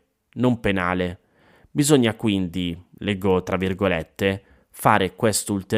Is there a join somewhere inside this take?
no; 0 cuts

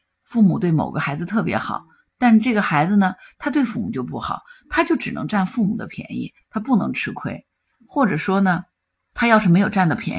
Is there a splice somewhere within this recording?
no; 0 cuts

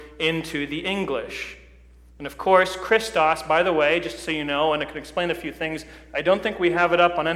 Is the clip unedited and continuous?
yes; 0 cuts

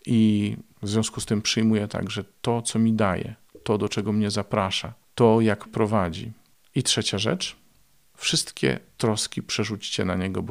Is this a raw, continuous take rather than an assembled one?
no; 1 cut; at 5.7 s

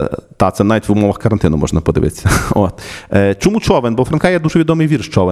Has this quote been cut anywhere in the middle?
no; 0 cuts

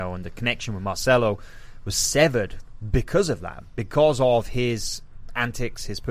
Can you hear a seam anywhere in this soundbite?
no; 0 cuts

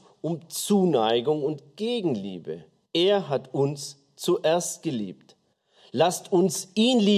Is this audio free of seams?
yes; 0 cuts

